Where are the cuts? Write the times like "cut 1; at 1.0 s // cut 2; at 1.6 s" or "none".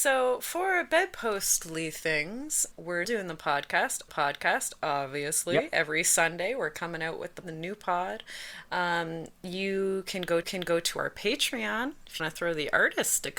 cut 1; at 2.7 s // cut 2; at 3.0 s // cut 3; at 4.1 s // cut 4; at 7.4 s // cut 5; at 10.4 s // cut 6; at 12.2 s

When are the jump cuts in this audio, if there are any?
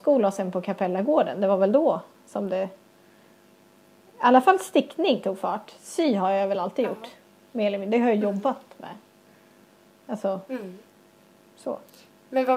none

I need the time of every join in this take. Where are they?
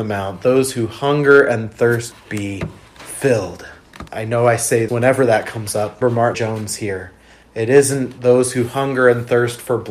cut 1; at 2.1 s // cut 2; at 4.1 s // cut 3; at 4.9 s // cut 4; at 6.0 s // cut 5; at 6.3 s

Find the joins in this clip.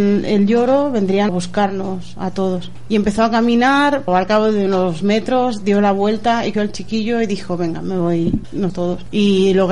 cut 1; at 1.3 s // cut 2; at 4.1 s // cut 3; at 6.5 s // cut 4; at 8.7 s

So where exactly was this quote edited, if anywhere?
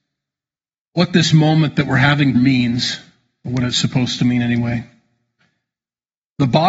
cut 1; at 2.3 s

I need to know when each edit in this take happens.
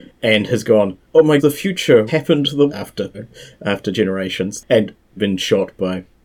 cut 1; at 1.0 s // cut 2; at 1.4 s // cut 3; at 2.1 s // cut 4; at 2.7 s // cut 5; at 3.1 s // cut 6; at 5.2 s

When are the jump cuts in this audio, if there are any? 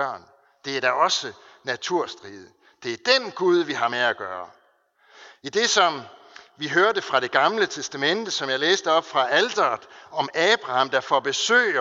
none

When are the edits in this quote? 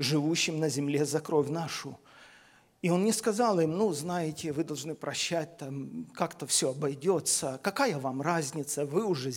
none

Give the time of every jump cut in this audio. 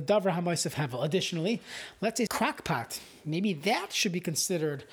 cut 1; at 2.3 s

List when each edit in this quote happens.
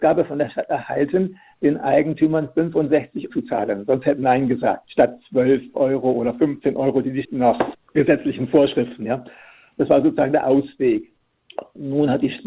cut 1; at 3.3 s // cut 2; at 4.2 s // cut 3; at 4.8 s // cut 4; at 7.2 s // cut 5; at 7.7 s

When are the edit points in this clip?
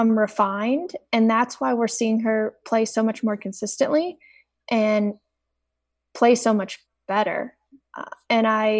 none

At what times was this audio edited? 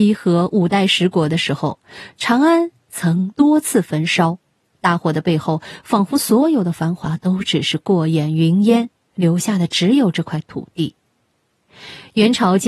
none

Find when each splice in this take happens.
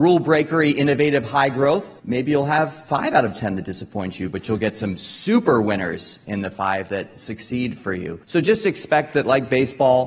cut 1; at 2.0 s // cut 2; at 8.2 s

